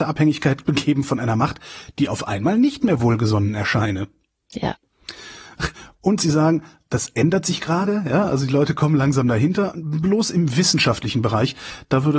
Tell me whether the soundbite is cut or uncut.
uncut